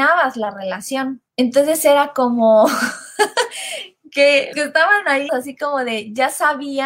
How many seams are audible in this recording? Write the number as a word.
three